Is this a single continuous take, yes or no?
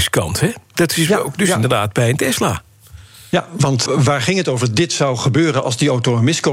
no